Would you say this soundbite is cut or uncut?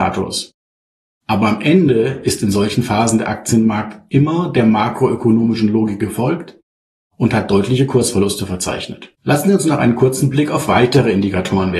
cut